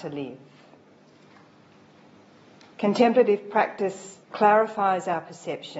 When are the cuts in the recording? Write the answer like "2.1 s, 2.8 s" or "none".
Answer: 4.2 s